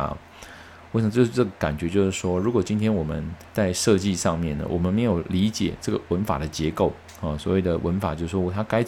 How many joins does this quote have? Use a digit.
1